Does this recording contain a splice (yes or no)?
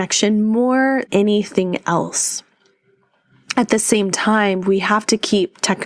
yes